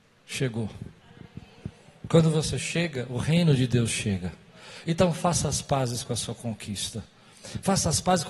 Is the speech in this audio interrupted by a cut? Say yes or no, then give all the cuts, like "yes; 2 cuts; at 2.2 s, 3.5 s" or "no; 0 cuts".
no; 0 cuts